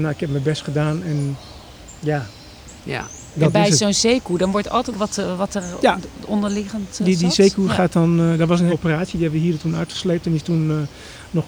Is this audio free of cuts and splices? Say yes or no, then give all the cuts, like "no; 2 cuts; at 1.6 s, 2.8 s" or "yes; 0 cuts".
no; 3 cuts; at 2.8 s, 4.9 s, 8.7 s